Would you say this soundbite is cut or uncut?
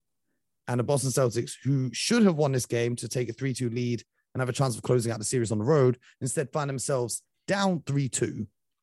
uncut